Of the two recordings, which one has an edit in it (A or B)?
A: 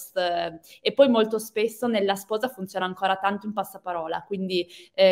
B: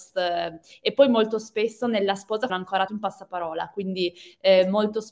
B